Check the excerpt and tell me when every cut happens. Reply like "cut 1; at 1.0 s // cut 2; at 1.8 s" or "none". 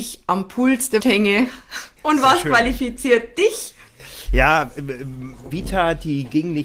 cut 1; at 1.0 s // cut 2; at 2.0 s // cut 3; at 5.5 s